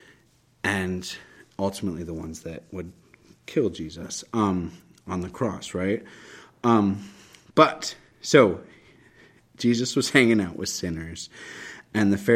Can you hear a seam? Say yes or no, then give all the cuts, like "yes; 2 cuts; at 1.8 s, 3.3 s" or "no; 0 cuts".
no; 0 cuts